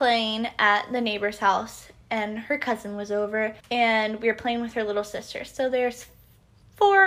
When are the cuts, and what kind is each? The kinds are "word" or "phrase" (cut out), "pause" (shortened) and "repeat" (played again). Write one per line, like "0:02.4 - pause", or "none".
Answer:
0:03.6 - pause